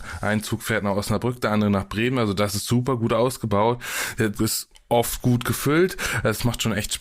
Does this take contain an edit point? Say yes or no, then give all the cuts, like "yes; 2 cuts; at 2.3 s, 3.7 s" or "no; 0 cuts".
yes; 1 cut; at 4.3 s